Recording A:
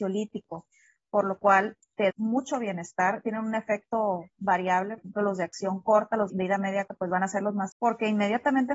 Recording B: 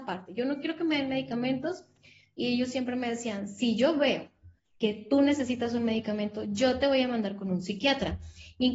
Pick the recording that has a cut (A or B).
A